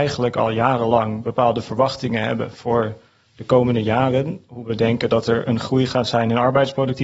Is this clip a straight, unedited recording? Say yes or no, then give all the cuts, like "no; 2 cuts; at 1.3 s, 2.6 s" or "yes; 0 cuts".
yes; 0 cuts